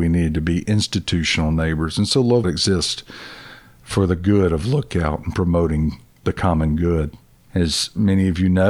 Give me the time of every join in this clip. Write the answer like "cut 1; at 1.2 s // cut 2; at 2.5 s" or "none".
cut 1; at 2.4 s